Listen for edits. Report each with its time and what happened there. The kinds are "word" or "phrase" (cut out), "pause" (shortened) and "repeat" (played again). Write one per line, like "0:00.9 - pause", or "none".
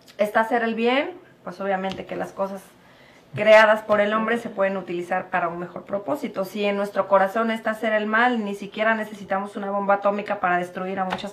none